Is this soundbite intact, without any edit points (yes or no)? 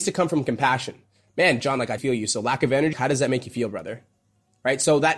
no